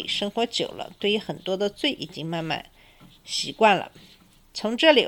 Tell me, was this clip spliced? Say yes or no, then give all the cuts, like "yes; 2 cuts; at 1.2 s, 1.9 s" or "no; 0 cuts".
no; 0 cuts